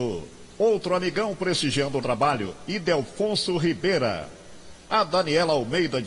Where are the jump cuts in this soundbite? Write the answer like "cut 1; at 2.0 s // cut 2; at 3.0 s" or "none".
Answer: cut 1; at 2.0 s